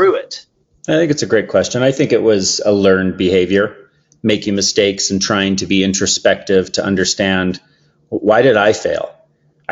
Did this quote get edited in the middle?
no; 0 cuts

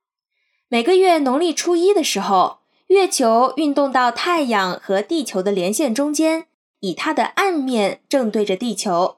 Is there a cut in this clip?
no; 0 cuts

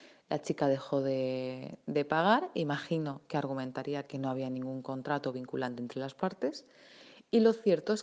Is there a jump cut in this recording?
no; 0 cuts

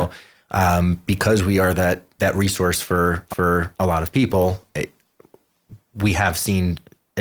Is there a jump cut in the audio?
yes; 1 cut; at 3.3 s

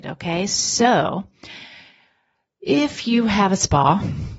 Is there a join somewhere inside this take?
no; 0 cuts

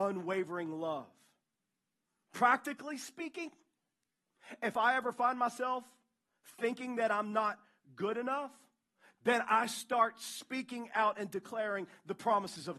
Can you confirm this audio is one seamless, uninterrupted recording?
yes; 0 cuts

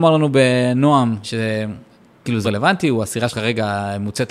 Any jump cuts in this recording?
yes; 3 cuts; at 1.2 s, 2.4 s, 3.3 s

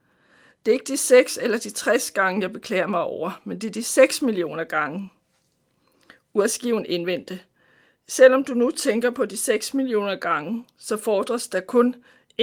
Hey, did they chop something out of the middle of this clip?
no; 0 cuts

